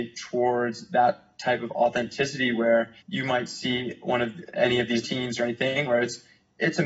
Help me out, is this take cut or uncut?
cut